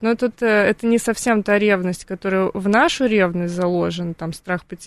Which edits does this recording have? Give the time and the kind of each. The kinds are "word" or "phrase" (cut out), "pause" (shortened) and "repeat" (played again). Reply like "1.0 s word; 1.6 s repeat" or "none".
none